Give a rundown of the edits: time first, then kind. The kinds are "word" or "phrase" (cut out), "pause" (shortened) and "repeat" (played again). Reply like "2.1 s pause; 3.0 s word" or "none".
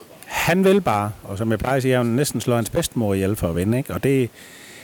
none